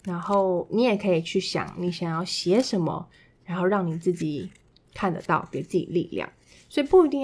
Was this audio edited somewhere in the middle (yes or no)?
no